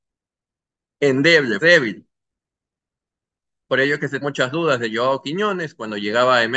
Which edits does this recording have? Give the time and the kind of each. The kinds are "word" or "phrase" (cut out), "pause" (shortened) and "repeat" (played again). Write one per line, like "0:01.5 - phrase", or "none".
0:01.6 - word
0:04.2 - word